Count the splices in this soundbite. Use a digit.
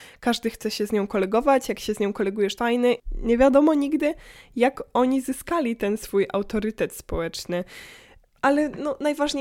2